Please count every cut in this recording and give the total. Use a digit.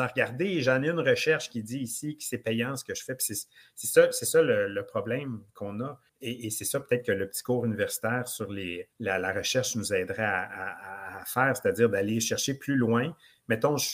2